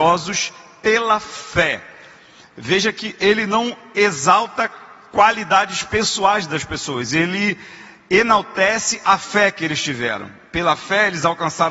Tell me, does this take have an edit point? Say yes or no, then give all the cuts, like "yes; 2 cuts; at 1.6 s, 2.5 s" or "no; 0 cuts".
no; 0 cuts